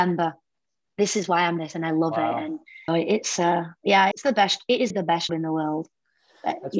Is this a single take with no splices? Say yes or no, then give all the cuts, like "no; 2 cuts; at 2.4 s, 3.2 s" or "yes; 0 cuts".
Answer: no; 5 cuts; at 1.6 s, 2.9 s, 4.1 s, 4.9 s, 5.3 s